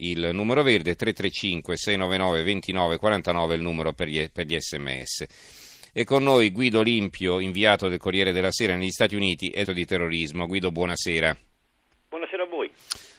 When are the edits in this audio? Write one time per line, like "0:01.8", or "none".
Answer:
0:09.6